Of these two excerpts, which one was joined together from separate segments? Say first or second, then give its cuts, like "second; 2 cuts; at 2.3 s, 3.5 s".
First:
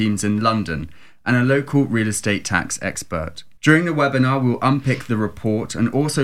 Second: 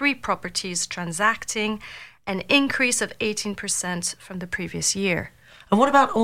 first; 1 cut; at 3.6 s